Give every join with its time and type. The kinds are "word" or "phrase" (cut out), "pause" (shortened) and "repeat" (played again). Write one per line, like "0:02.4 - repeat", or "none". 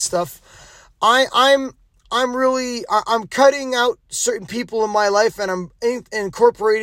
none